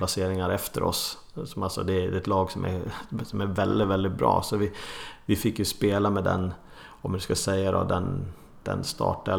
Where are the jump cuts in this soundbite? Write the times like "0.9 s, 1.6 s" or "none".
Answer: none